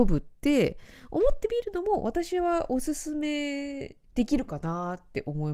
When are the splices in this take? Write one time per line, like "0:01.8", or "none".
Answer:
0:04.1